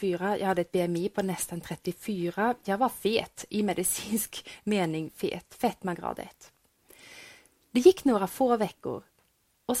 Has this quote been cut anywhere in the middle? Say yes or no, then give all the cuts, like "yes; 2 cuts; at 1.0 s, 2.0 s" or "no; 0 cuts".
no; 0 cuts